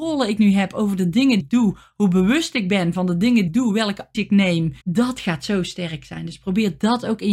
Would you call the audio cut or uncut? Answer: cut